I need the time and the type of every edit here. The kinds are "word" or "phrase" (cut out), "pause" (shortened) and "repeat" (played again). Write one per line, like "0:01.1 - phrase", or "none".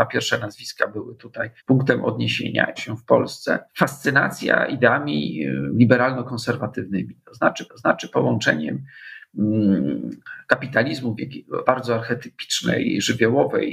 0:01.6 - pause
0:02.8 - phrase
0:03.7 - pause
0:07.7 - repeat
0:11.6 - word

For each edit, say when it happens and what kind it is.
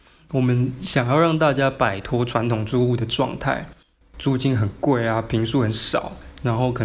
none

